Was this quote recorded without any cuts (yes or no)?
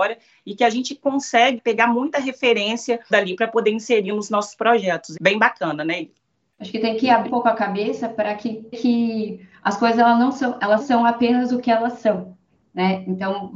no